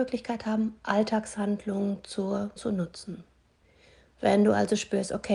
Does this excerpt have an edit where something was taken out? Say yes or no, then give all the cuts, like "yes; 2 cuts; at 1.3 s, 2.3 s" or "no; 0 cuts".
yes; 1 cut; at 2.6 s